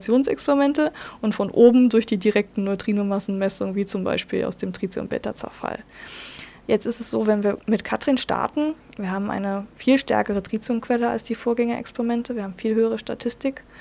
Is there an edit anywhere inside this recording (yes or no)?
no